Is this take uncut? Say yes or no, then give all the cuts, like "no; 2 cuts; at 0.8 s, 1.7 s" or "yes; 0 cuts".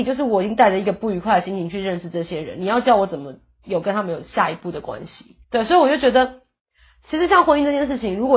no; 1 cut; at 5.4 s